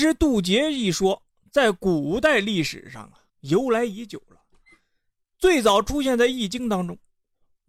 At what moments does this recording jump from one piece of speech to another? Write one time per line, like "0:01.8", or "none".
0:03.3